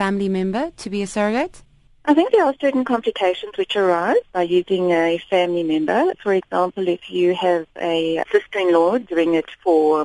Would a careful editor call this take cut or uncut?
uncut